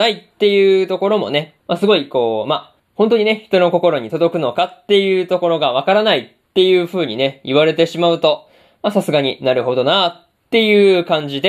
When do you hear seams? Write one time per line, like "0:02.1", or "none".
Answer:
0:01.6
0:02.8